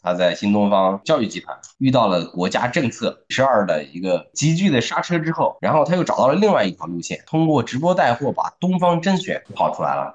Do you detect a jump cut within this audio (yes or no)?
yes